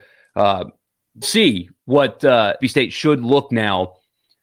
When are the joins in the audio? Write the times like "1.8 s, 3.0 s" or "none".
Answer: 1.2 s, 2.6 s, 3.5 s